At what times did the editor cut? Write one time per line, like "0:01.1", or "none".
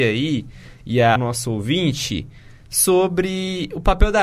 0:01.2